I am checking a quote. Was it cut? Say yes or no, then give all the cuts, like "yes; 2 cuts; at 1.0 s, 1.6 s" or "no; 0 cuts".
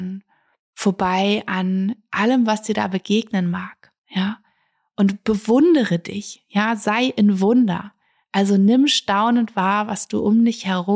yes; 1 cut; at 4.0 s